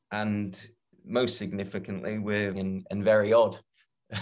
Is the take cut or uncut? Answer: cut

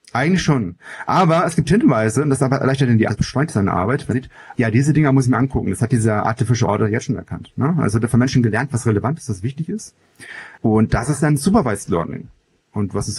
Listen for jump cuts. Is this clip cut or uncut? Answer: cut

